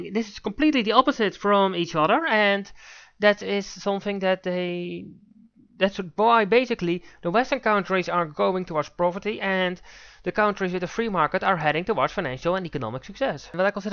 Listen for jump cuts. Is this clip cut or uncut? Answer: uncut